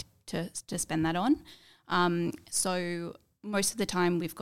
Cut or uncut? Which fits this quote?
uncut